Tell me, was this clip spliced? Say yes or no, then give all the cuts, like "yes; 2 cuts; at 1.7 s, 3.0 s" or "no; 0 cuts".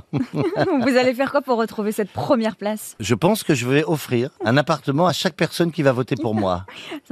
no; 0 cuts